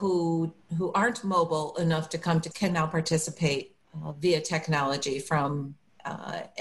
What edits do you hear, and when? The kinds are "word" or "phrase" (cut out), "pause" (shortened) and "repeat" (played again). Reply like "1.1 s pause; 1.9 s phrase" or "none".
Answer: 2.5 s word; 3.8 s pause